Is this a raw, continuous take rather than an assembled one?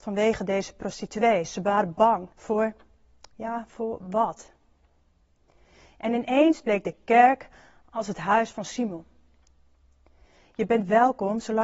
no; 1 cut; at 2.3 s

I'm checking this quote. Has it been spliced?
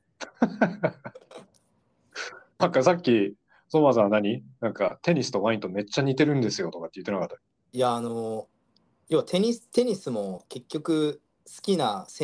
yes; 2 cuts; at 2.6 s, 7.6 s

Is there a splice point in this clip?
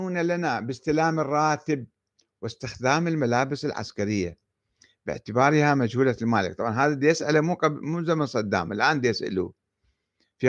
no; 0 cuts

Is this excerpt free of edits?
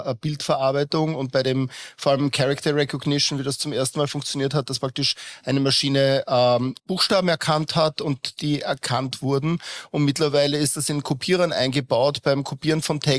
no; 1 cut; at 6.8 s

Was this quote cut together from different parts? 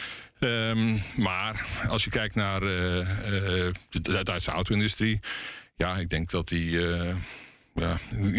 no; 0 cuts

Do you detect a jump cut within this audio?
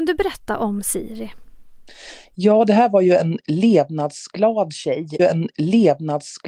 yes; 1 cut; at 5.2 s

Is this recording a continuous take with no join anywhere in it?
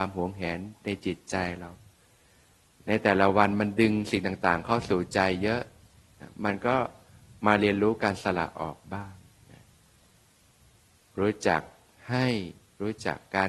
yes; 0 cuts

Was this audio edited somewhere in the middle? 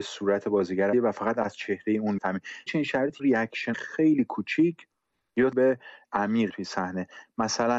yes; 8 cuts; at 0.9 s, 2.2 s, 2.7 s, 3.2 s, 3.7 s, 5.5 s, 6.0 s, 6.5 s

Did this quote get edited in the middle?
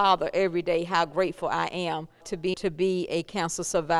yes; 2 cuts; at 2.2 s, 2.5 s

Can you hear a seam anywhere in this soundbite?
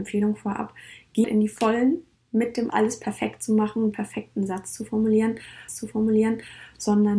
yes; 5 cuts; at 1.2 s, 2.2 s, 2.7 s, 3.9 s, 5.7 s

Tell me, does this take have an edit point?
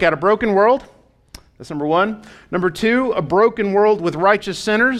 no; 0 cuts

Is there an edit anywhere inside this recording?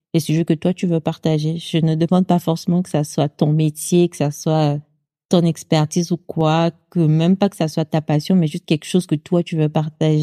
no; 0 cuts

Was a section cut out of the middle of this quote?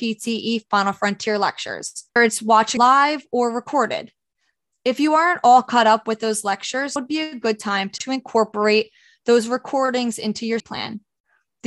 yes; 5 cuts; at 2.2 s, 2.8 s, 7.0 s, 8.0 s, 10.6 s

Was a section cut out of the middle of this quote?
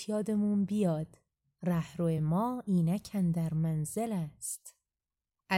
no; 0 cuts

